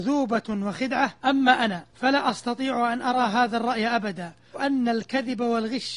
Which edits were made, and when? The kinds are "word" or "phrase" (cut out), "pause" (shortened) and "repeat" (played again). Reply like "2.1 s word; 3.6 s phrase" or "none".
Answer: 1.2 s pause; 1.9 s pause; 4.5 s word